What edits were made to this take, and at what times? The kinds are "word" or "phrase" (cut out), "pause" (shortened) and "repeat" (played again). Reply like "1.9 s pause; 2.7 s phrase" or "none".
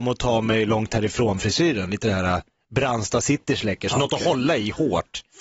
none